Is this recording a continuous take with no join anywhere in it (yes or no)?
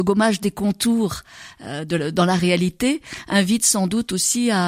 yes